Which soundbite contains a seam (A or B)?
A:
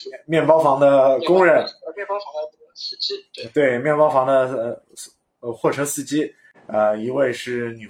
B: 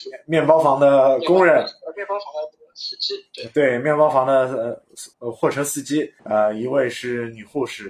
B